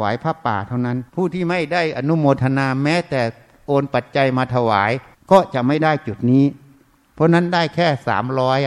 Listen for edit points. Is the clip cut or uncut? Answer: cut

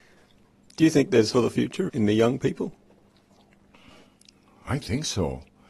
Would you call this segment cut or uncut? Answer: cut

